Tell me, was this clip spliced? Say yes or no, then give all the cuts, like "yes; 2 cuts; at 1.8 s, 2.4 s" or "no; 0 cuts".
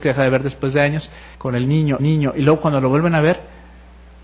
yes; 2 cuts; at 1.3 s, 2.0 s